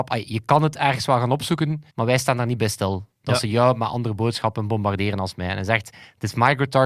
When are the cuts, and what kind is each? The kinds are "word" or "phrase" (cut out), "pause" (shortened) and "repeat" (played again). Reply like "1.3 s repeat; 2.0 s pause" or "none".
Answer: 1.9 s pause